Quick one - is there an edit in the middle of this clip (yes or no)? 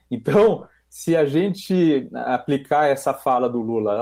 no